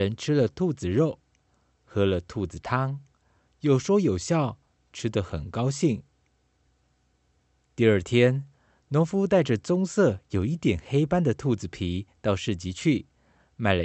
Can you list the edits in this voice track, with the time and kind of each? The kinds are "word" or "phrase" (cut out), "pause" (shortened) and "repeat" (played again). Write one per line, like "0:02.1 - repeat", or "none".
none